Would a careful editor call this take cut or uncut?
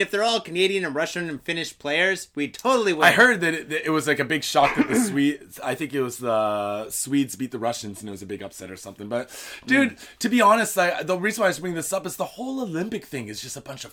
uncut